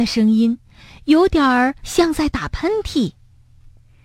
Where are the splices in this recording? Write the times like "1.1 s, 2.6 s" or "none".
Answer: 1.8 s